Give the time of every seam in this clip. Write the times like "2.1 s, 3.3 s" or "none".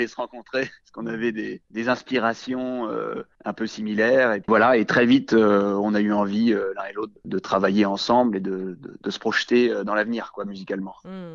none